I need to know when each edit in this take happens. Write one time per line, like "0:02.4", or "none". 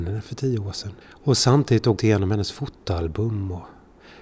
0:01.0
0:02.0

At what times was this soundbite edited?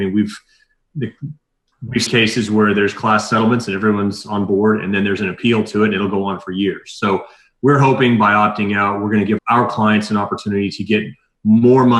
0:00.9
0:02.1
0:09.4

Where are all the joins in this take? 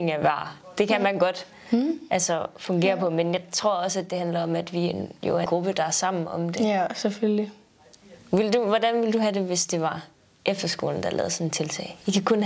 0:05.5

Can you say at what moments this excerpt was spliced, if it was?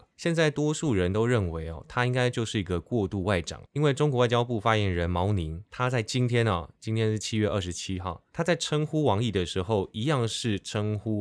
0:03.7

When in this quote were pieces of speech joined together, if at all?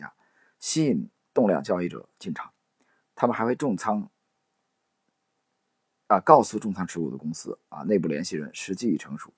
none

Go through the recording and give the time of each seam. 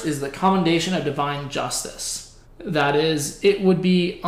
0:02.4

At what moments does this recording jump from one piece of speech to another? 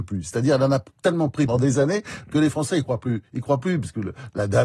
0:01.5

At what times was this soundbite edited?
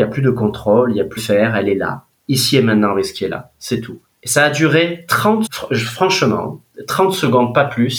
0:01.2
0:04.0
0:05.5

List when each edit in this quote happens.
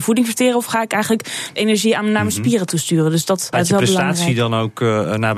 0:01.6
0:03.5

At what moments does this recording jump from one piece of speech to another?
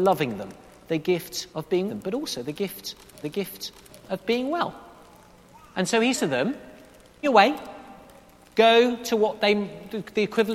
0:01.5
0:01.9
0:03.2
0:06.1
0:07.2

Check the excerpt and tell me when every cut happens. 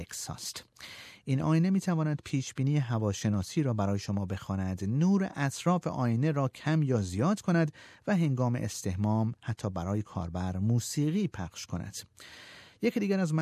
none

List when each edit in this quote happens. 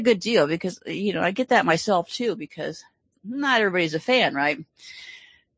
none

